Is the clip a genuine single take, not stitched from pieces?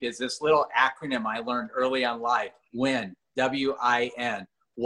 yes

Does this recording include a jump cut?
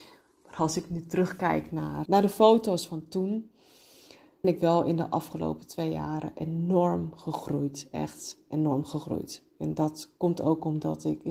yes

